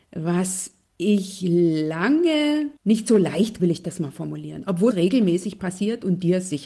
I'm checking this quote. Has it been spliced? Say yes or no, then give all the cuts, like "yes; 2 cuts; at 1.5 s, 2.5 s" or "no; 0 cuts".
yes; 3 cuts; at 2.8 s, 3.6 s, 4.9 s